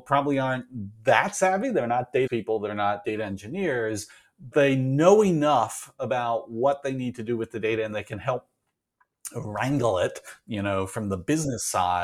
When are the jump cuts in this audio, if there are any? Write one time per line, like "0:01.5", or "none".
0:02.3
0:03.0
0:04.5